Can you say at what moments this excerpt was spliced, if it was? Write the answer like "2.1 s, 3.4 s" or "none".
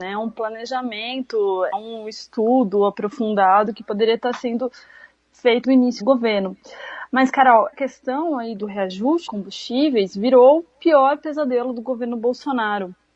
1.7 s, 5.6 s, 6.0 s, 7.7 s, 8.6 s, 9.3 s